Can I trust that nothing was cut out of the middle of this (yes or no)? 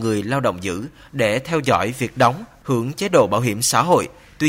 yes